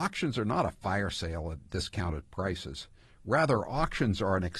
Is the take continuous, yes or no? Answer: yes